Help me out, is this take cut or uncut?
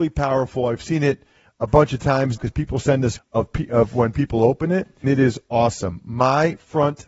cut